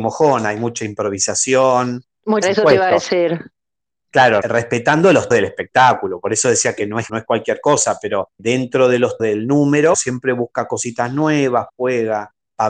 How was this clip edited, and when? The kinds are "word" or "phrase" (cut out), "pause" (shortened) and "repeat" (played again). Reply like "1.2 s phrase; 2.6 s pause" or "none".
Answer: 2.4 s word; 4.4 s word; 5.3 s word; 7.1 s word; 8.4 s word; 9.2 s word; 9.9 s word; 11.7 s word